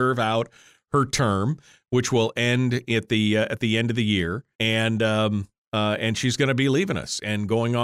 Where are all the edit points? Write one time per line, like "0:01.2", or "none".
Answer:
0:04.5